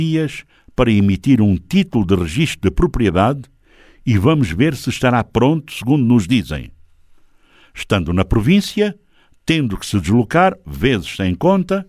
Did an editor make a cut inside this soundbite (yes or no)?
no